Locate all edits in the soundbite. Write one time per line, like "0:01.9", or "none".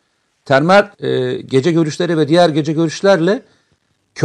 0:00.9